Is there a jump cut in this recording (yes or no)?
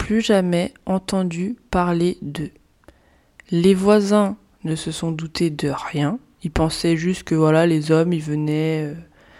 no